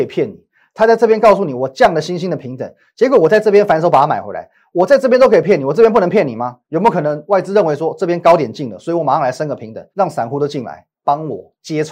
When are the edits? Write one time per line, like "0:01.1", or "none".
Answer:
0:06.6
0:09.9
0:10.9